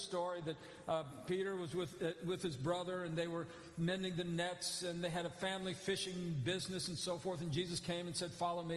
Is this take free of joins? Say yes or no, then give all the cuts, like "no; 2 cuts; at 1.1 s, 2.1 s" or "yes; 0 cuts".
yes; 0 cuts